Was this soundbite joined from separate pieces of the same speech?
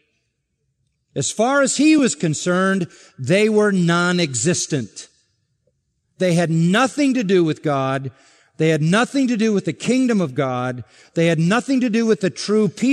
no; 0 cuts

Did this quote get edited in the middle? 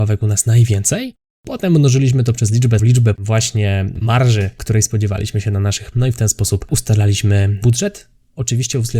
yes; 3 cuts; at 2.8 s, 3.2 s, 5.9 s

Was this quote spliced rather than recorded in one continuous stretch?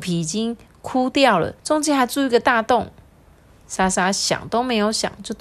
yes; 1 cut; at 1.6 s

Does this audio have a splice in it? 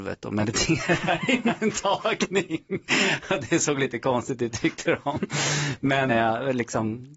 yes; 1 cut; at 6.1 s

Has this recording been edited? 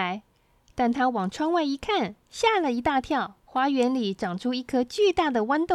yes; 2 cuts; at 2.2 s, 3.4 s

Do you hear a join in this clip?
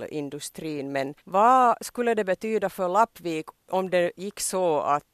yes; 1 cut; at 1.2 s

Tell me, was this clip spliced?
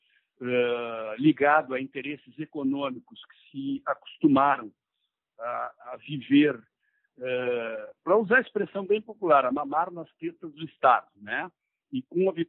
yes; 1 cut; at 8.0 s

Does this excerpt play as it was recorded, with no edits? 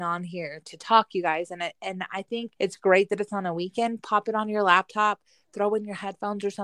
no; 1 cut; at 2.6 s

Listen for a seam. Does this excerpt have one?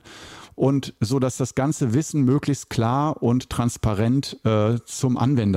no; 0 cuts

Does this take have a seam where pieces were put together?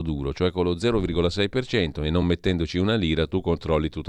no; 0 cuts

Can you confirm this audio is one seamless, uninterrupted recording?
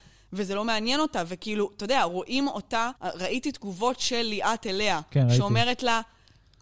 no; 1 cut; at 3.0 s

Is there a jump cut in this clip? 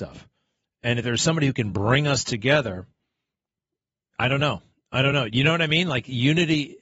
no; 0 cuts

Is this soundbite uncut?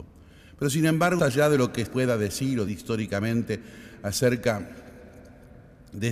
no; 3 cuts; at 1.2 s, 1.9 s, 2.7 s

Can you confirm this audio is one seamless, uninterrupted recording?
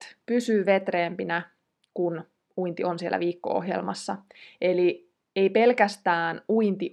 yes; 0 cuts

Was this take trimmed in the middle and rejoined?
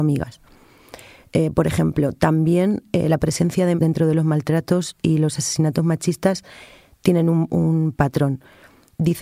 yes; 1 cut; at 3.7 s

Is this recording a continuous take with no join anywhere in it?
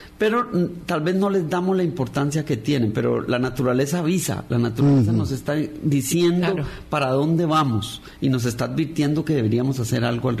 yes; 0 cuts

